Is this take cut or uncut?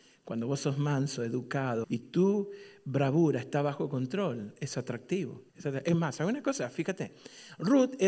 cut